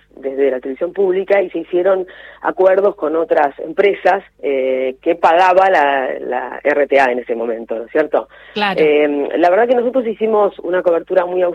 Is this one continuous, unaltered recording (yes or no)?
no